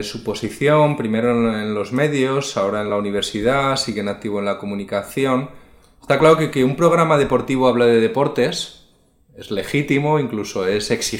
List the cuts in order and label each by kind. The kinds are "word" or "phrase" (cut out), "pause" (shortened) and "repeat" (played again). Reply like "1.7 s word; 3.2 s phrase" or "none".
none